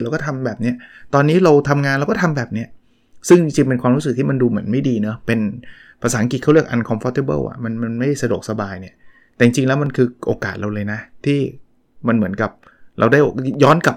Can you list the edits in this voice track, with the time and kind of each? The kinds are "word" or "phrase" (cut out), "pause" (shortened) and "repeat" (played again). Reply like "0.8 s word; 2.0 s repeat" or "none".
none